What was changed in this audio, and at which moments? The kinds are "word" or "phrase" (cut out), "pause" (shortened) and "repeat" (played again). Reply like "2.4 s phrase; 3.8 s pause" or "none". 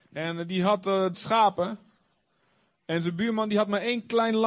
1.1 s word